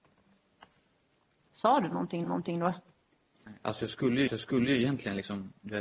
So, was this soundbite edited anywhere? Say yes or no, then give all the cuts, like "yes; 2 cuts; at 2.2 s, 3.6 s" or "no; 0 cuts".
yes; 2 cuts; at 2.2 s, 4.3 s